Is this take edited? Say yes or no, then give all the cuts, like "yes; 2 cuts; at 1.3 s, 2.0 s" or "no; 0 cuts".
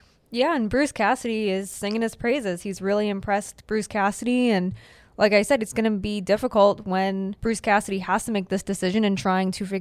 yes; 1 cut; at 7.4 s